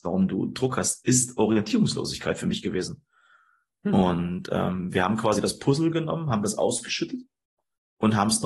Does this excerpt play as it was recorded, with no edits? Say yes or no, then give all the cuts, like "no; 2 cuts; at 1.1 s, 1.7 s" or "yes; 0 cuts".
yes; 0 cuts